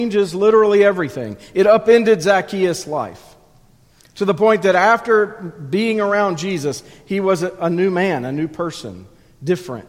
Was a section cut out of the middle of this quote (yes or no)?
no